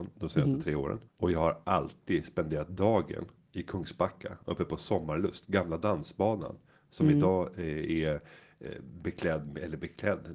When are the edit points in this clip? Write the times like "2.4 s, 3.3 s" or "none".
1.1 s